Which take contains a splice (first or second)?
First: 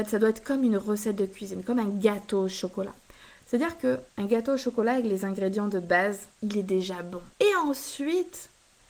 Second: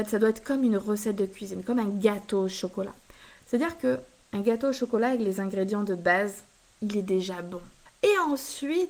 first